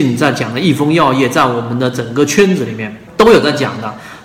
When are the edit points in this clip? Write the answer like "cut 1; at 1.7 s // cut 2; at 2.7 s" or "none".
cut 1; at 3.1 s